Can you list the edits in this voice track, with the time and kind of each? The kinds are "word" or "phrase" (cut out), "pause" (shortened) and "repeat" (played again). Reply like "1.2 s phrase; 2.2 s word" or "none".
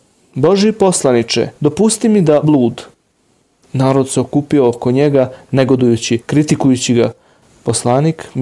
1.5 s pause; 2.4 s word; 6.2 s pause